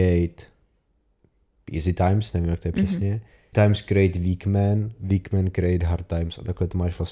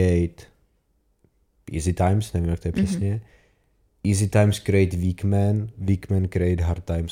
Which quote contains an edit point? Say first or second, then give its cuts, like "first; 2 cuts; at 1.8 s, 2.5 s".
first; 1 cut; at 3.5 s